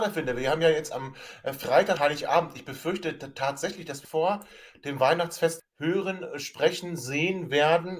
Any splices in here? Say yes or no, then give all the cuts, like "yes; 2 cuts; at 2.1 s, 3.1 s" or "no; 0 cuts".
yes; 3 cuts; at 2.0 s, 4.0 s, 5.6 s